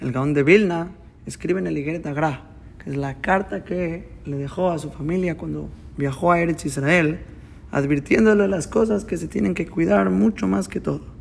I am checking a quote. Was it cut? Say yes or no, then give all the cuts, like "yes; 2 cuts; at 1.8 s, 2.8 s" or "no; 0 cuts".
no; 0 cuts